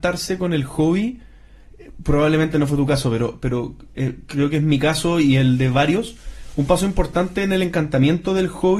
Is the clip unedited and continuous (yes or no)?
yes